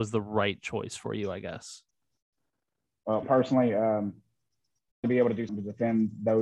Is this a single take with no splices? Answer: no; 3 cuts; at 3.2 s, 5.0 s, 5.5 s

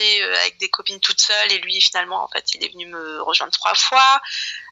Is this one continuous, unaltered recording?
yes; 0 cuts

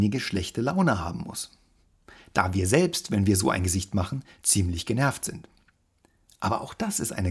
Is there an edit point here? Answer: no; 0 cuts

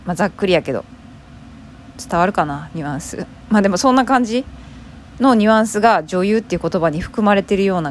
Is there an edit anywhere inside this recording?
yes; 1 cut; at 2.0 s

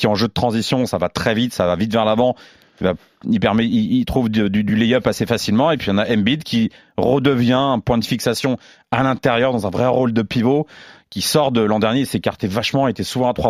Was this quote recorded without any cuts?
yes; 0 cuts

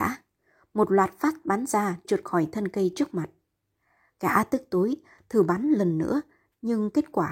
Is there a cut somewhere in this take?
yes; 1 cut; at 2.0 s

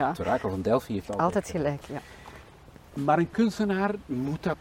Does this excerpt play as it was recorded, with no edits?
yes; 0 cuts

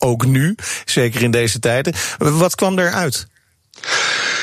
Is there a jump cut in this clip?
no; 0 cuts

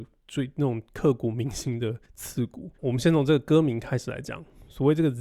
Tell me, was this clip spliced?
yes; 2 cuts; at 2.0 s, 2.7 s

